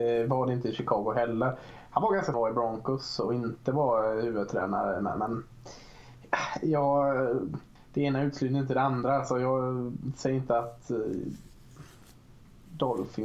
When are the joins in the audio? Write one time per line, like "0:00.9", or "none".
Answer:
0:02.3
0:07.8